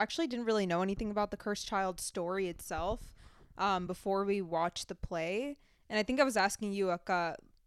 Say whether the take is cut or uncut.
uncut